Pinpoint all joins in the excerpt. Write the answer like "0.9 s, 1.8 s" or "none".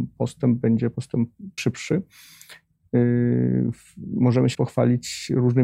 1.6 s, 4.5 s